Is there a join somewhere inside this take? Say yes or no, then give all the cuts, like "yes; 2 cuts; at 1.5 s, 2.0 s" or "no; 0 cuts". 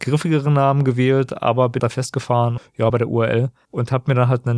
yes; 3 cuts; at 1.8 s, 2.6 s, 2.9 s